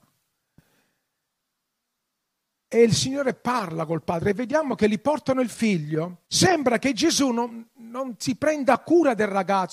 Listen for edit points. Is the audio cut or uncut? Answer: cut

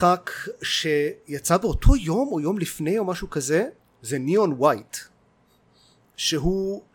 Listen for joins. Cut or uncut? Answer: uncut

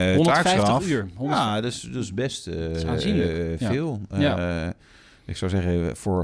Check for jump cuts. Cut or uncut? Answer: uncut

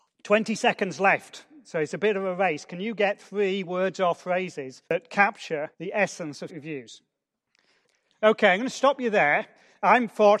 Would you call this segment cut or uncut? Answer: cut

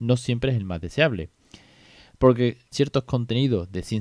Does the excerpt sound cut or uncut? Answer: cut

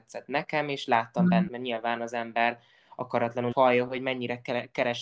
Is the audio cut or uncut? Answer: cut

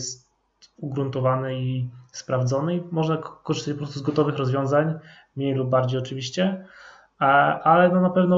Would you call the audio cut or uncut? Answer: uncut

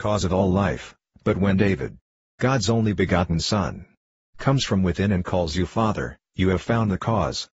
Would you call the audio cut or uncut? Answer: uncut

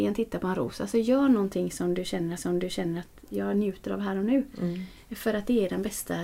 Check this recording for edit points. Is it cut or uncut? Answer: cut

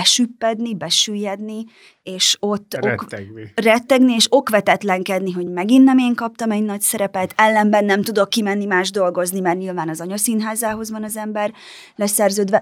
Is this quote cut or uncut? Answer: uncut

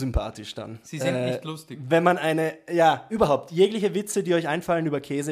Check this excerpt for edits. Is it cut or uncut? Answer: uncut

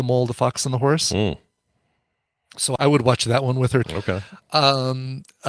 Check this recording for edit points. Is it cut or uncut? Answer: cut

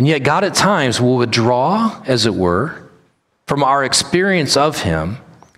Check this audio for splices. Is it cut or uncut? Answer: uncut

